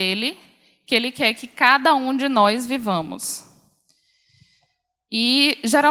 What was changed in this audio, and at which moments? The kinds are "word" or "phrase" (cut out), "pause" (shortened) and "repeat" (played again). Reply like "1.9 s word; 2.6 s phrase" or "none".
none